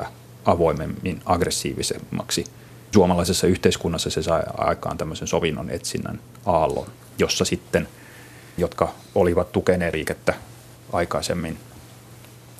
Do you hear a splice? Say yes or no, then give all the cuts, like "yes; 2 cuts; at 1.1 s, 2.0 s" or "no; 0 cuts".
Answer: yes; 3 cuts; at 2.9 s, 8.6 s, 9.9 s